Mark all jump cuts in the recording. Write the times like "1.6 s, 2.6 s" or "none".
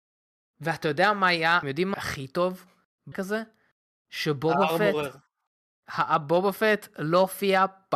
1.6 s, 1.9 s, 3.1 s

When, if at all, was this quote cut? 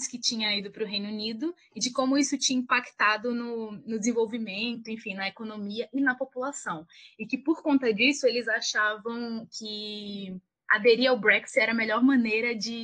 none

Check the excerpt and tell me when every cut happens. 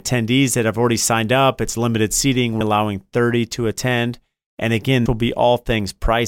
2.6 s, 5.1 s

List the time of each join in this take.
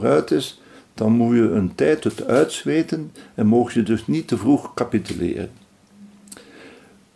none

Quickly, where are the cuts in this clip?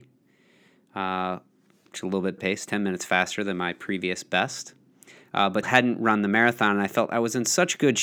2.4 s, 5.6 s

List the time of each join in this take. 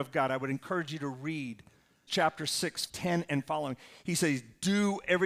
2.1 s, 2.9 s

